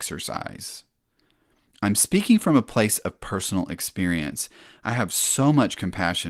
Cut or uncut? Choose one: uncut